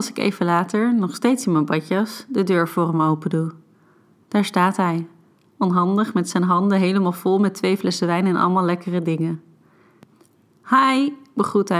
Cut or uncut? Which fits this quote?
uncut